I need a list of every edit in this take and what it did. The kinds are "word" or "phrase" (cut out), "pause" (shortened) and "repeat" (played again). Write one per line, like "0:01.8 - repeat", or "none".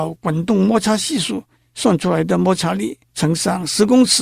0:01.6 - pause
0:03.0 - pause